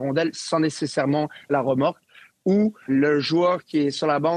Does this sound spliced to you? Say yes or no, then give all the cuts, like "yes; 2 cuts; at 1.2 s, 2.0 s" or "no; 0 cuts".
yes; 2 cuts; at 1.5 s, 2.9 s